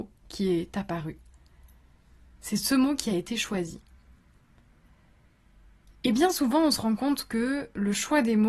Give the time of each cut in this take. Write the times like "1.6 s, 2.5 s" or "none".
none